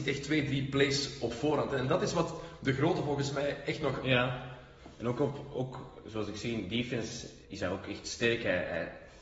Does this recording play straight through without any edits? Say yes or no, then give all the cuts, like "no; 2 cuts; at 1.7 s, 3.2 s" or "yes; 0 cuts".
no; 1 cut; at 7.4 s